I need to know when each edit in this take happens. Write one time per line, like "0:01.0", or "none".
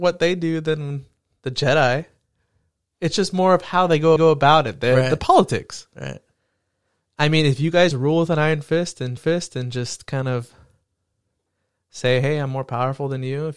0:04.2
0:07.9
0:09.2